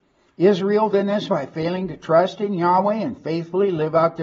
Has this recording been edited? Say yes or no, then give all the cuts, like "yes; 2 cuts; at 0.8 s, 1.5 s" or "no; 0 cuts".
yes; 2 cuts; at 0.9 s, 1.3 s